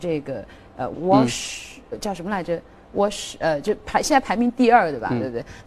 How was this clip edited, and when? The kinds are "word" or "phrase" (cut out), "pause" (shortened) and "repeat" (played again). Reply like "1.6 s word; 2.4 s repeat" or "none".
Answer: 0.9 s word; 1.9 s word